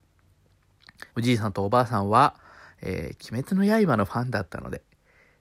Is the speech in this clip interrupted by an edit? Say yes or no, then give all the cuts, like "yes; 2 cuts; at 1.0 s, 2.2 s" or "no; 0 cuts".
yes; 2 cuts; at 1.1 s, 2.4 s